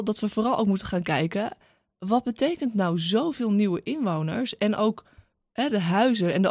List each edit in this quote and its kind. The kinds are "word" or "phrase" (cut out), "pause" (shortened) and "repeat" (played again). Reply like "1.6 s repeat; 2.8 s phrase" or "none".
none